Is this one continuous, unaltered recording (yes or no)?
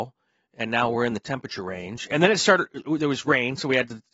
yes